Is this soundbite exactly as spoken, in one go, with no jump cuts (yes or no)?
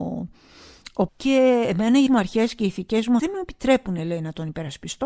no